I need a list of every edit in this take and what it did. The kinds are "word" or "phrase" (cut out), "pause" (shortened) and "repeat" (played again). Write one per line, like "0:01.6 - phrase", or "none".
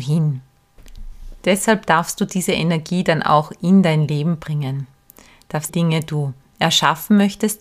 0:05.7 - phrase